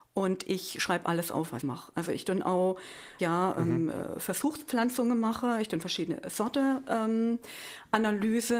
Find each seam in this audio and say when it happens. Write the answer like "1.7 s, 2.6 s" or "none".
1.6 s, 3.2 s